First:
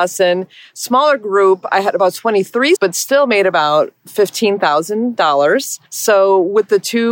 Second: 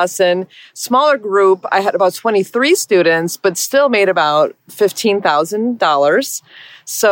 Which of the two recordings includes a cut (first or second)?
first